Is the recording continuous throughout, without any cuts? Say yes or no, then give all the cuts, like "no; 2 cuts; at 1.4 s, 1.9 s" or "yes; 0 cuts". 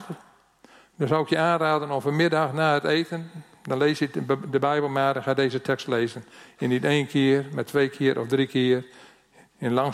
yes; 0 cuts